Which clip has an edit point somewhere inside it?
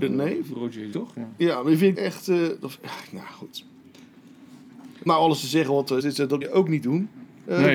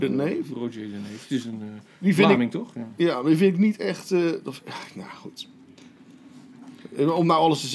first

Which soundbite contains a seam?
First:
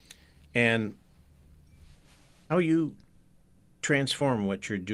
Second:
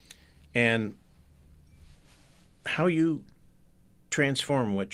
first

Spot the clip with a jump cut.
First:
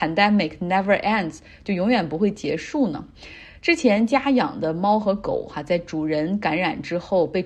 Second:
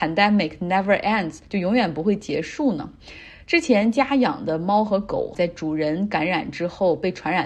second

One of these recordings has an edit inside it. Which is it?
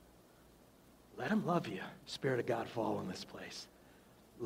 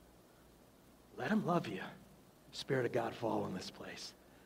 first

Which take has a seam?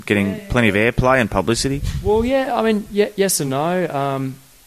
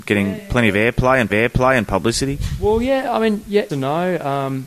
second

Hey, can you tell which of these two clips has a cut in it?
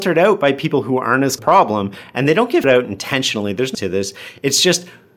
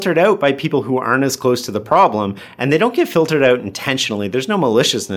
first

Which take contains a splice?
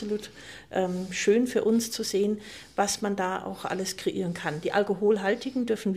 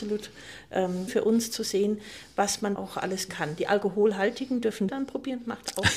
second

